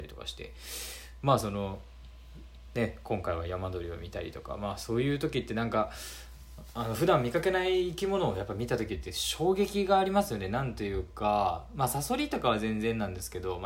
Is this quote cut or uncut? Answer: uncut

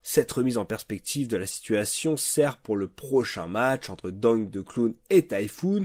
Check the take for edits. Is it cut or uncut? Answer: uncut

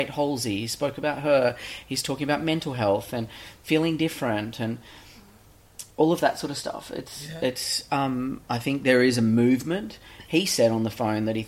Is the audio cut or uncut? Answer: cut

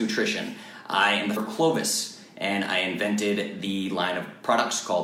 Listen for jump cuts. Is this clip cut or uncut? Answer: cut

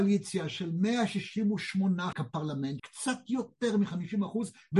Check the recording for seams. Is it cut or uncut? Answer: cut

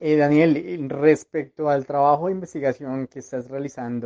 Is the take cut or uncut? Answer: uncut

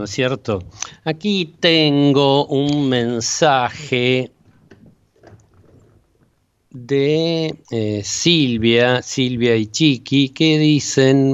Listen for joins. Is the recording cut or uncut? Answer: cut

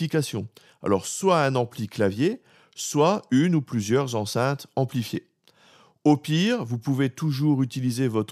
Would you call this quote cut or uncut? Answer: uncut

